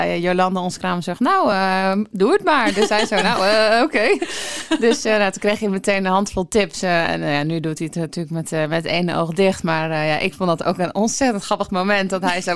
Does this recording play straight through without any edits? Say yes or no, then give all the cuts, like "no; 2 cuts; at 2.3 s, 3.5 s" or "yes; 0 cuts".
yes; 0 cuts